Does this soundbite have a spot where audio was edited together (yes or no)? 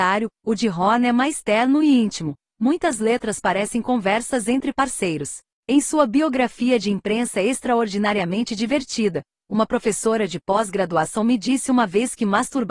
no